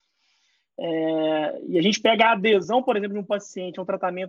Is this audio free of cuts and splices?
yes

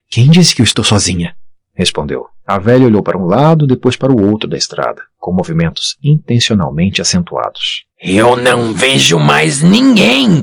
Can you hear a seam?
yes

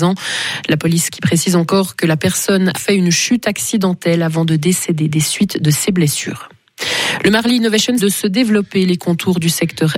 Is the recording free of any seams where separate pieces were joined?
no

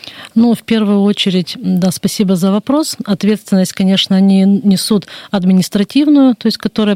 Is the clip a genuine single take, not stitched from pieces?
yes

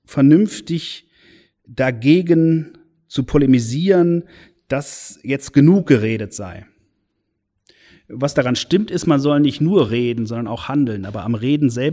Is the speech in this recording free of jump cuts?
yes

